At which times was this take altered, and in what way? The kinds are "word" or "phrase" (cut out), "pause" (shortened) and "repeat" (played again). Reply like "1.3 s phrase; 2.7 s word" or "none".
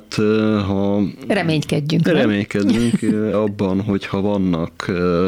3.3 s word